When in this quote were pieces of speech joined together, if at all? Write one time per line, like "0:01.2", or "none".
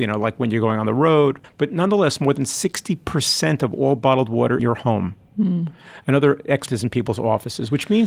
0:01.4
0:04.6
0:06.7